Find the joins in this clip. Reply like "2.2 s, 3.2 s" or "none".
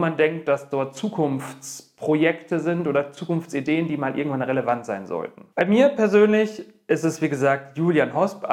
5.5 s